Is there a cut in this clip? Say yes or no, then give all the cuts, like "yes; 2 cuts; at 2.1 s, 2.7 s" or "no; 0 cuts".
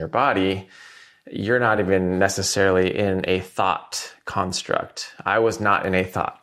no; 0 cuts